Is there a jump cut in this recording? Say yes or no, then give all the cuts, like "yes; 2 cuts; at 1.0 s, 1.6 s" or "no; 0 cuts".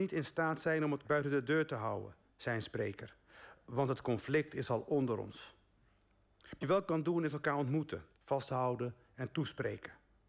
yes; 3 cuts; at 1.0 s, 6.6 s, 8.1 s